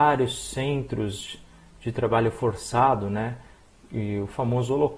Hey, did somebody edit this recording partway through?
no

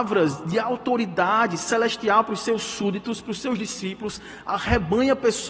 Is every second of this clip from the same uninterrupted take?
yes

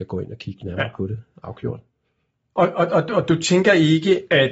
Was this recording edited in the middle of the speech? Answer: no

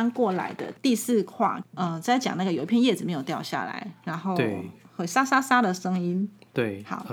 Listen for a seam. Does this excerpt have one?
no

